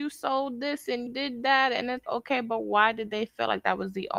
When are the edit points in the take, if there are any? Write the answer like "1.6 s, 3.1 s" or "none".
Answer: 1.1 s, 2.0 s